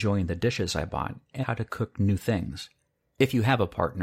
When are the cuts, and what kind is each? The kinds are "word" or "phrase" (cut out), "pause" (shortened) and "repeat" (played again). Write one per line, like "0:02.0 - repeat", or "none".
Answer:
0:01.4 - word